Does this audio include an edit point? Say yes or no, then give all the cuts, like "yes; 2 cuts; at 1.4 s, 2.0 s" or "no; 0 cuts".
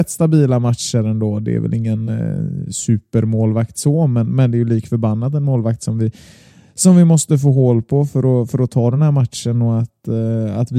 no; 0 cuts